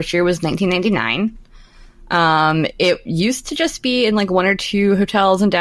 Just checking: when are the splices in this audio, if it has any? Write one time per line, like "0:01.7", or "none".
none